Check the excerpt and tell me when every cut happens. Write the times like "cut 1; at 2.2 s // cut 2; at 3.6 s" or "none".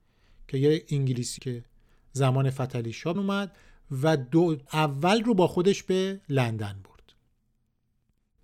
cut 1; at 1.4 s // cut 2; at 3.1 s // cut 3; at 4.7 s